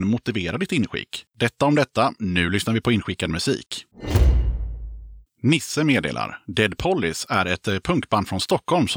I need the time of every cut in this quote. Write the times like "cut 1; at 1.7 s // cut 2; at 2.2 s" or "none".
cut 1; at 1.3 s